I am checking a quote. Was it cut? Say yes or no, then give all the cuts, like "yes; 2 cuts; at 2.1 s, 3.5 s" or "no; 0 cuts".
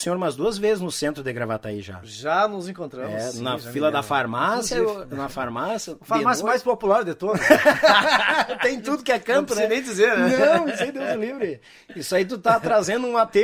no; 0 cuts